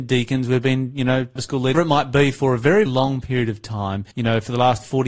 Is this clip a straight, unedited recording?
no; 4 cuts; at 1.4 s, 1.7 s, 2.9 s, 4.1 s

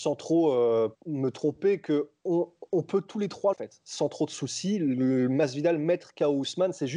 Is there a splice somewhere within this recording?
yes; 3 cuts; at 0.9 s, 2.2 s, 3.5 s

